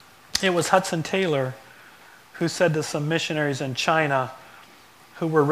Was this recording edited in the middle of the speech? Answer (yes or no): no